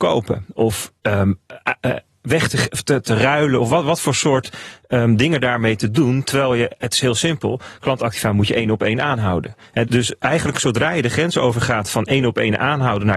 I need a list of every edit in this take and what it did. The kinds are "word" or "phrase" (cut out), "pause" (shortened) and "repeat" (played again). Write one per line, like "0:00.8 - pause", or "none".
0:01.0 - pause
0:03.0 - word
0:09.8 - word